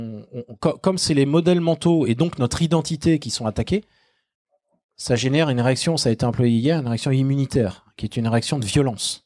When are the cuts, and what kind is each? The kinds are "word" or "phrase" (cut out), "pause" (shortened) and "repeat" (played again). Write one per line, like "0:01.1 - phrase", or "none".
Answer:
none

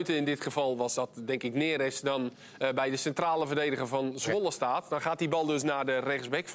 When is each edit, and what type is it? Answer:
none

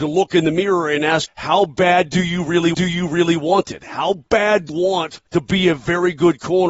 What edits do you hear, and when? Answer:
0:01.3 - word
0:02.7 - repeat
0:04.7 - word
0:05.3 - pause

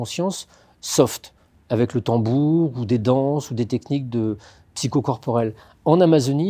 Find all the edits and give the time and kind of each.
none

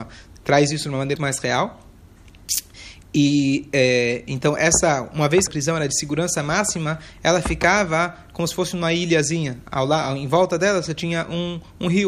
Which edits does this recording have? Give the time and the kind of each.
0:01.2 - word
0:05.5 - phrase

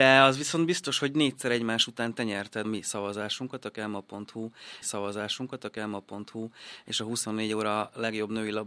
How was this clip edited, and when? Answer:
0:02.6 - word
0:04.8 - repeat

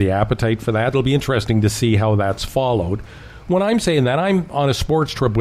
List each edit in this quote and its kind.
0:00.9 - word

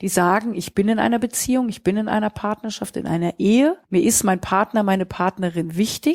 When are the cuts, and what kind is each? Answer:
0:03.8 - pause

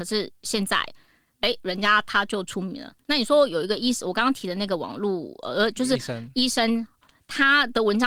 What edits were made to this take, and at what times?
none

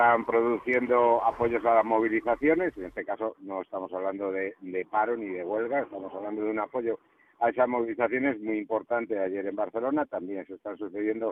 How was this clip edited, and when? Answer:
none

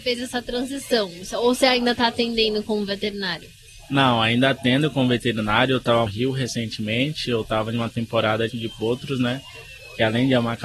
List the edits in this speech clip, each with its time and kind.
0:06.1 - phrase
0:08.5 - phrase

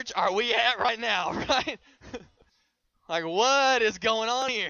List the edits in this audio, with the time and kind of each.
0:02.5 - pause

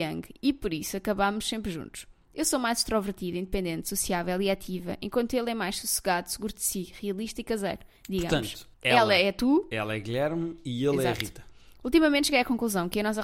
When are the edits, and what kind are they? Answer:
0:08.7 - pause

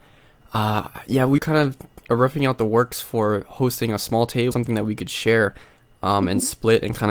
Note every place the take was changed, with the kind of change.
0:01.4 - word
0:04.5 - word

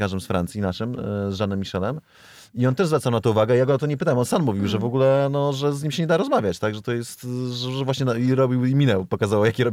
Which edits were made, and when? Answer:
none

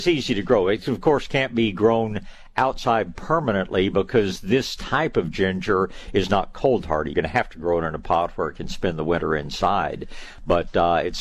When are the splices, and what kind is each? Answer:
0:07.1 - word

